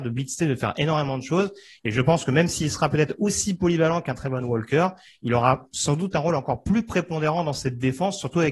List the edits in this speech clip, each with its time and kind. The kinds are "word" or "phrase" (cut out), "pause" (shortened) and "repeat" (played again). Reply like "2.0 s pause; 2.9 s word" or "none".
none